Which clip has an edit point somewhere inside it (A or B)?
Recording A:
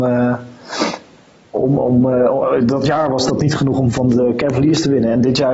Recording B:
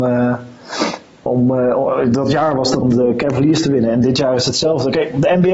B